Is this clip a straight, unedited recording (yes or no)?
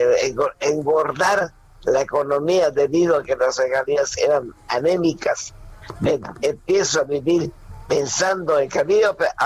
yes